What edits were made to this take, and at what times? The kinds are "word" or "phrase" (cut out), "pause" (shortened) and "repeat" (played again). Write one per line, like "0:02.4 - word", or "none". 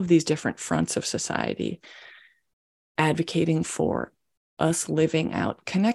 none